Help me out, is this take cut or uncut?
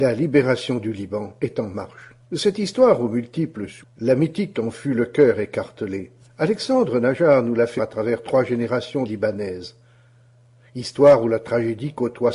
cut